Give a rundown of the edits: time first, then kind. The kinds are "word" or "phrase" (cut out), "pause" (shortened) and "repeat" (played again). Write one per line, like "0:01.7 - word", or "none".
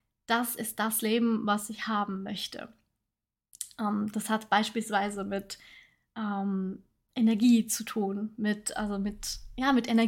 none